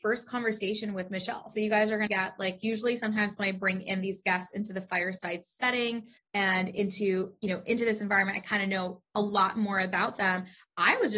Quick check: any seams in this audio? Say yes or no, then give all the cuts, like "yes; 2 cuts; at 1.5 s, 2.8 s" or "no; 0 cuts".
yes; 2 cuts; at 2.1 s, 6.2 s